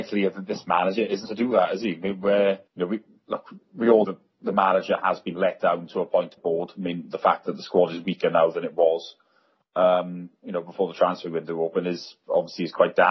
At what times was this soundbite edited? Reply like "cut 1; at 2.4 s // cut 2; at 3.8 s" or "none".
cut 1; at 1.2 s // cut 2; at 2.7 s // cut 3; at 4.0 s // cut 4; at 6.4 s